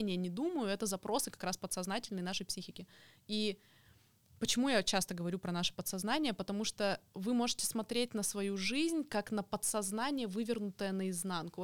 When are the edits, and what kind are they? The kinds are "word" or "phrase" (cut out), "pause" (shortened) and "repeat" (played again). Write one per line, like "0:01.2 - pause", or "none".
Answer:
none